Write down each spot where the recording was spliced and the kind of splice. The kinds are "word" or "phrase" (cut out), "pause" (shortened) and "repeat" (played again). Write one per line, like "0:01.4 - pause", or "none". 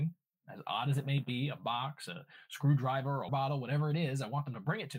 0:03.3 - word